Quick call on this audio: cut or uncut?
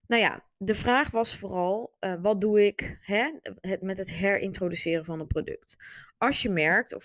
uncut